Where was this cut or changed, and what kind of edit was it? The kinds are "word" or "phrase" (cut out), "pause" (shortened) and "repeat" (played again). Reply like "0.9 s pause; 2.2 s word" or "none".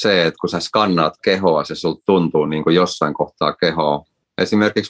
none

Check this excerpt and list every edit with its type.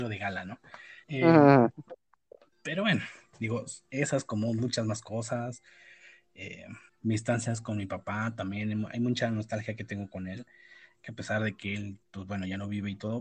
1.0 s pause; 6.9 s pause; 12.0 s pause

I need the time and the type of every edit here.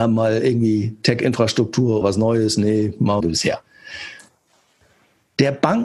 2.0 s word; 3.2 s phrase

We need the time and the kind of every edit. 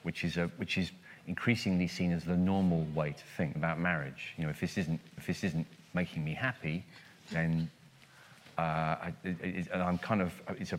3.6 s word; 5.2 s repeat

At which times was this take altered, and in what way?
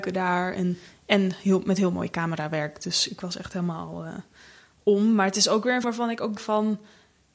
5.8 s word; 6.4 s word

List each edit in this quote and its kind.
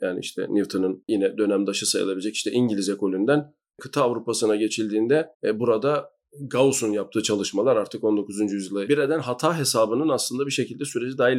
5.3 s pause; 8.9 s phrase

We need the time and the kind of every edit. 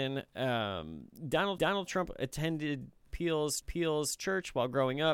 1.6 s repeat; 3.6 s repeat

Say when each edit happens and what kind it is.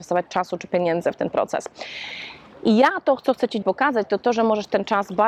3.6 s word

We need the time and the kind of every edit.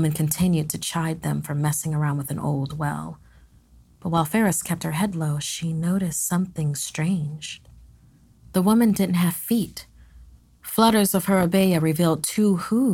none

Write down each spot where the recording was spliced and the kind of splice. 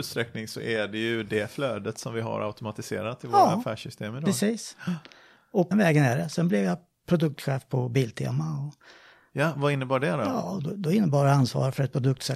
5.7 s word

